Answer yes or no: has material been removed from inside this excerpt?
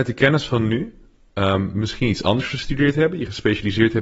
no